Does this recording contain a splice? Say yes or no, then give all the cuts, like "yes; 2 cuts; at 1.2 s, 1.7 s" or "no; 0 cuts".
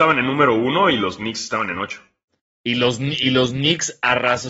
no; 0 cuts